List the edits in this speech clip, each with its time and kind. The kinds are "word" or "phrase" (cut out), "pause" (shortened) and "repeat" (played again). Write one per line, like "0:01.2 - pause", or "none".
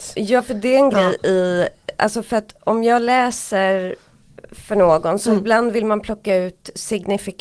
none